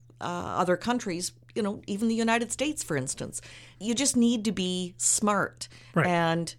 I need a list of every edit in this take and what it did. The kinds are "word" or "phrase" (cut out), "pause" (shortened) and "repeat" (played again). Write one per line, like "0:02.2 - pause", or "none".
0:03.7 - pause